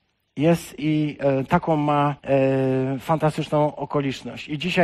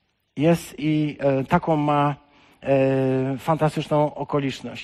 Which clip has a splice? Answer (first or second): first